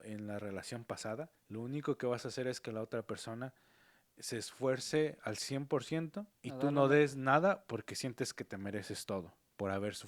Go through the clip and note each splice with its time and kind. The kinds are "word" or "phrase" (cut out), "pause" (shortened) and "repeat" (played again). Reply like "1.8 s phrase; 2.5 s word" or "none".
1.4 s pause; 6.4 s pause